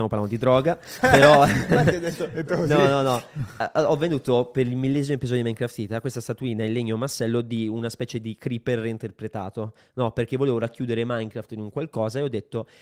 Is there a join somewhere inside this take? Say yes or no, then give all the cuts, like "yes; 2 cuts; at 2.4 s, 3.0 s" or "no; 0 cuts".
no; 0 cuts